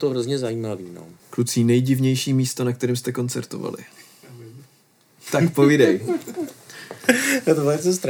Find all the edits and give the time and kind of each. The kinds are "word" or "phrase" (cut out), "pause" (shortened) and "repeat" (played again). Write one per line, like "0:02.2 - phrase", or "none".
none